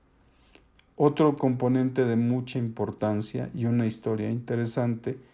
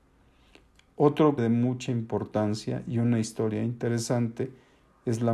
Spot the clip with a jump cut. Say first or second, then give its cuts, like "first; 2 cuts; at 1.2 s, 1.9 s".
second; 1 cut; at 1.4 s